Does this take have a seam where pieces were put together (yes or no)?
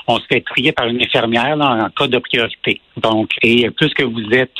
yes